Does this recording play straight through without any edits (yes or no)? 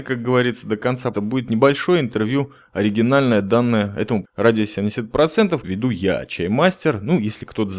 no